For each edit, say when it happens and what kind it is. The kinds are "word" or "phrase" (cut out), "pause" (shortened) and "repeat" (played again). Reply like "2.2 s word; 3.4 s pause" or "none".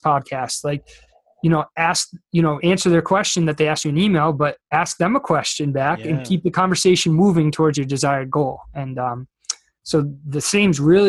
none